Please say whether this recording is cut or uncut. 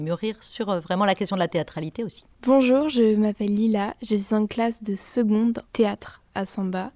cut